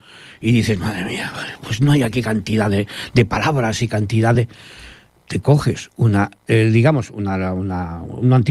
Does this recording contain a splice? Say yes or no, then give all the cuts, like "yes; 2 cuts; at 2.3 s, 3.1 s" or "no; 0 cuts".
no; 0 cuts